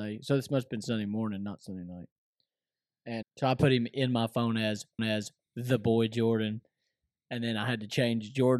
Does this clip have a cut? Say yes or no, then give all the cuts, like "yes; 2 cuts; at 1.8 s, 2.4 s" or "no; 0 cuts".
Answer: yes; 2 cuts; at 3.2 s, 5.0 s